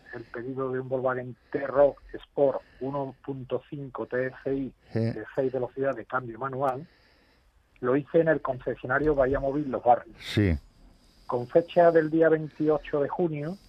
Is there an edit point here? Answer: no; 0 cuts

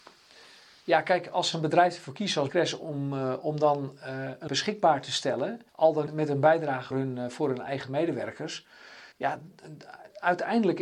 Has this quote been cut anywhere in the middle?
yes; 7 cuts; at 1.5 s, 2.5 s, 4.5 s, 5.7 s, 6.1 s, 6.9 s, 9.1 s

